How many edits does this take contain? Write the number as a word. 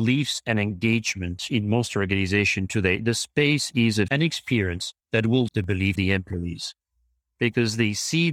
four